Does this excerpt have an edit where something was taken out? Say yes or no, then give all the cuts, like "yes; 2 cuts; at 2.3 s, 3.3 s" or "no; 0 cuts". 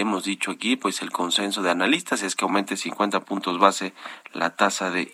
no; 0 cuts